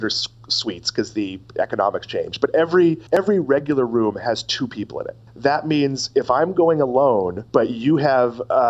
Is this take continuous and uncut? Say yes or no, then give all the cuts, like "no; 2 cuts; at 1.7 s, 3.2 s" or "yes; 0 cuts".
no; 3 cuts; at 3.1 s, 5.3 s, 7.5 s